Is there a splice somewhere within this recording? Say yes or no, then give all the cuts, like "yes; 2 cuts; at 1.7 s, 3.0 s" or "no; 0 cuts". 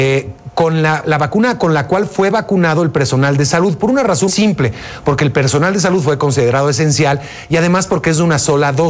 yes; 2 cuts; at 1.0 s, 4.3 s